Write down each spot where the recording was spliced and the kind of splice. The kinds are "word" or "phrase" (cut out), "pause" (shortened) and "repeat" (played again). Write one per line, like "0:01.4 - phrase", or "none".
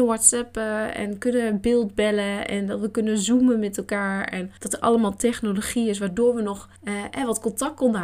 0:04.6 - pause
0:06.8 - pause